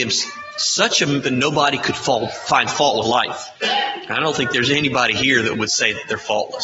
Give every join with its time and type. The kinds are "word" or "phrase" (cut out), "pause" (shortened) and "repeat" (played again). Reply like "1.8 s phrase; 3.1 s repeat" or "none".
1.2 s word; 3.0 s word; 3.6 s pause